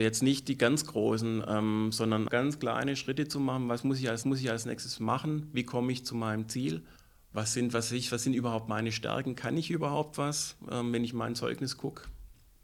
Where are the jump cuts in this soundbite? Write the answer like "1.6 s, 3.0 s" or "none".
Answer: 2.3 s, 4.2 s, 7.0 s